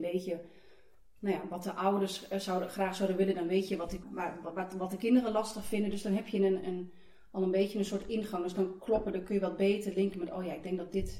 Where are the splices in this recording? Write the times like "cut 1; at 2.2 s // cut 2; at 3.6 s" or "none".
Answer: cut 1; at 4.0 s // cut 2; at 6.6 s // cut 3; at 9.2 s